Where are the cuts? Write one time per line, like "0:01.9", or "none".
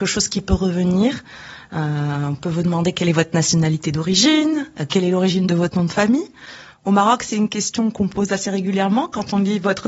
none